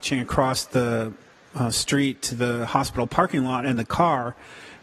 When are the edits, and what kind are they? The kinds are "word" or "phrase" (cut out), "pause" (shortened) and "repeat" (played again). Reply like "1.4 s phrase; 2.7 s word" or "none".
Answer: none